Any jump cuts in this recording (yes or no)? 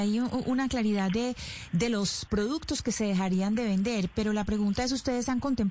no